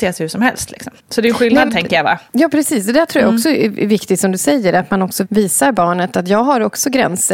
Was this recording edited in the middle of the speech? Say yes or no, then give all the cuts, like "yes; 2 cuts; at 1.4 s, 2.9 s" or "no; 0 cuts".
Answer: yes; 4 cuts; at 1.0 s, 1.7 s, 2.3 s, 5.2 s